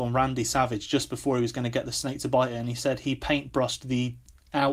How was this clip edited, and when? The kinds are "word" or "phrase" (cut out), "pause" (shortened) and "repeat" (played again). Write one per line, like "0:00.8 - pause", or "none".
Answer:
none